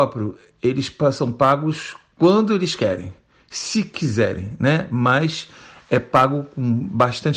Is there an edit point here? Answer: no; 0 cuts

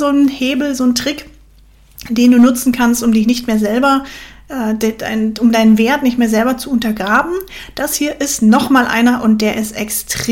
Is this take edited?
no; 0 cuts

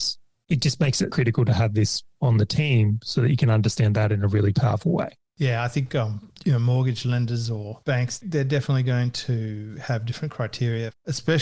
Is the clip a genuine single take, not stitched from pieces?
no; 3 cuts; at 1.1 s, 5.2 s, 7.8 s

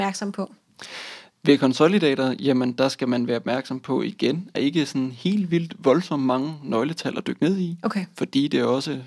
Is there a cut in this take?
yes; 1 cut; at 4.5 s

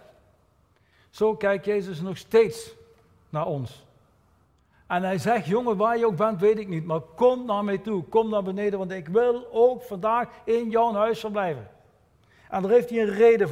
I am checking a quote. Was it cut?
no; 0 cuts

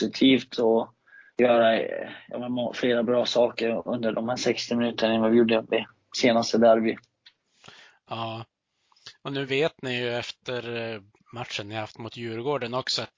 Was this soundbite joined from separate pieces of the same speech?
no; 0 cuts

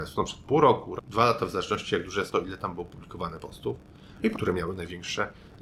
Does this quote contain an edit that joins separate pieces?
yes; 3 cuts; at 1.0 s, 2.3 s, 4.3 s

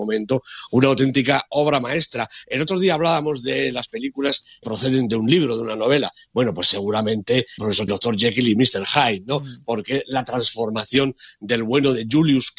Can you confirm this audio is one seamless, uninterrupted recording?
no; 3 cuts; at 4.6 s, 7.6 s, 7.9 s

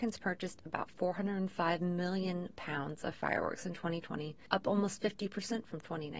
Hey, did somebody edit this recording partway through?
no; 0 cuts

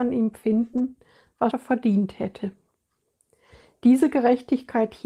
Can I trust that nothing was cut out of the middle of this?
no; 1 cut; at 1.5 s

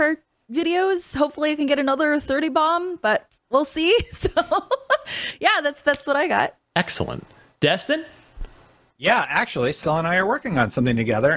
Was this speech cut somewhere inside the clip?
no; 0 cuts

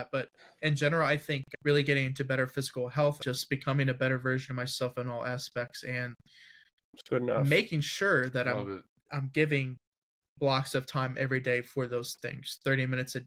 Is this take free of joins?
yes; 0 cuts

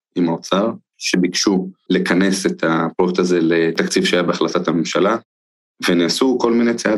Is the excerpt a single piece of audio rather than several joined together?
yes; 0 cuts

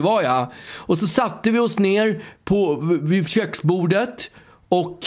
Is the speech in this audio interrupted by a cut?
no; 0 cuts

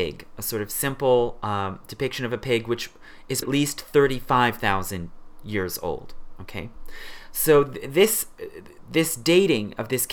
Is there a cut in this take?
yes; 1 cut; at 3.4 s

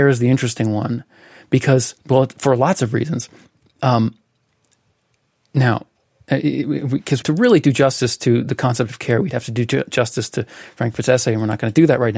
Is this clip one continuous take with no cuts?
no; 3 cuts; at 2.0 s, 3.5 s, 7.2 s

